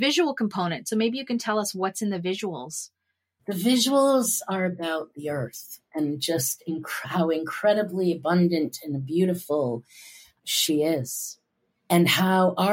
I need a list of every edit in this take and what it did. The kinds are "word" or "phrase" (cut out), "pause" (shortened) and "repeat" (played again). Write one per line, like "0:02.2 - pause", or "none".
none